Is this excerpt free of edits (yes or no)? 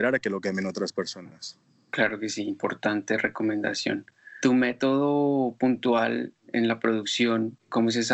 yes